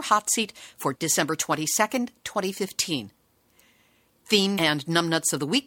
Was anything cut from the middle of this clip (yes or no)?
yes